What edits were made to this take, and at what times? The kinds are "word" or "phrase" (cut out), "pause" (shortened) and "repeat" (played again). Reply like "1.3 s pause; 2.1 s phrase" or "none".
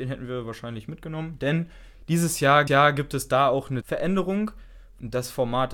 2.7 s repeat; 3.8 s phrase

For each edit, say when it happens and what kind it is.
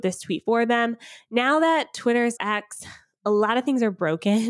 2.4 s word

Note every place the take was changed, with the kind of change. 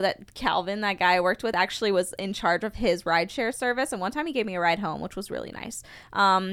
none

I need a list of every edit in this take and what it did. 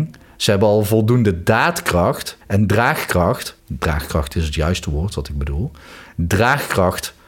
2.4 s pause; 3.6 s pause

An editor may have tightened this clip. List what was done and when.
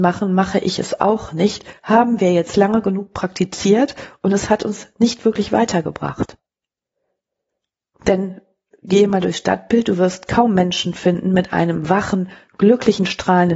none

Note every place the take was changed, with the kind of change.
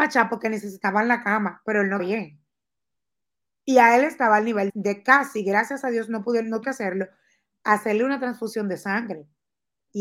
2.0 s word; 4.7 s word; 6.6 s word

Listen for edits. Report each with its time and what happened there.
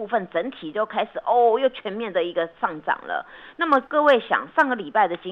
3.9 s pause

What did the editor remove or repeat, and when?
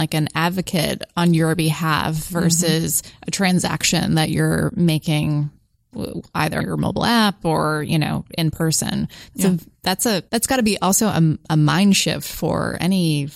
6.6 s word; 10.3 s pause

